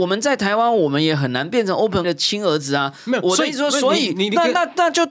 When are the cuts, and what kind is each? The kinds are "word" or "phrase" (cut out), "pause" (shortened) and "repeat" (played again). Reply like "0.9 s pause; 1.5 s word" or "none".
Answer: 2.0 s word